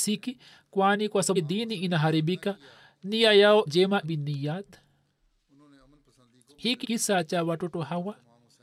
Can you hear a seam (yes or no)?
yes